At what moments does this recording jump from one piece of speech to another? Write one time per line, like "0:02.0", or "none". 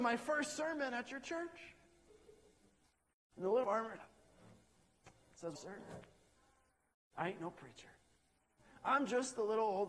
0:03.6
0:04.0
0:05.6